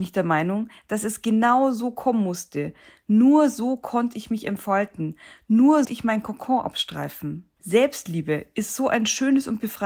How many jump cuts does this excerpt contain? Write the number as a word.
two